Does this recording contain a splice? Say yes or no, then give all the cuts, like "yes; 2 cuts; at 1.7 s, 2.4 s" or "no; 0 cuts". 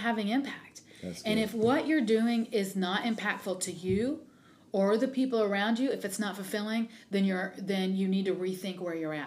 no; 0 cuts